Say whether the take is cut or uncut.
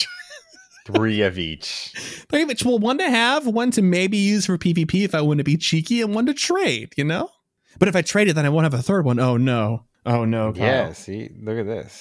uncut